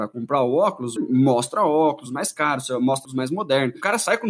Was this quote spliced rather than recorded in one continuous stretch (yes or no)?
yes